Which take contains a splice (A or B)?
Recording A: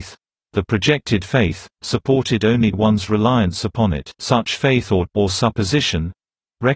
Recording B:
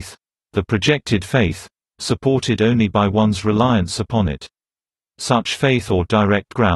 A